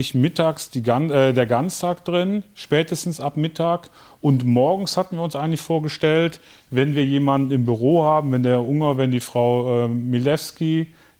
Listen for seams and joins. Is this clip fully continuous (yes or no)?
yes